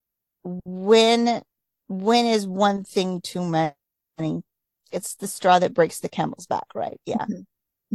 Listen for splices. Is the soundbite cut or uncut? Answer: uncut